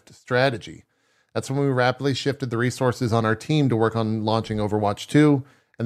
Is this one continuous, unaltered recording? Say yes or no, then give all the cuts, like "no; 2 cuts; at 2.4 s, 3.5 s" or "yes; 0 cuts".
yes; 0 cuts